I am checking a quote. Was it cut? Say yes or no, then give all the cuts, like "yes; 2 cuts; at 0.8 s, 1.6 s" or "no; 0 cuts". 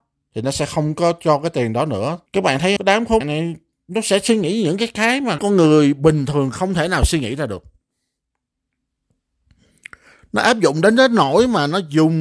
yes; 4 cuts; at 2.3 s, 2.8 s, 3.2 s, 5.4 s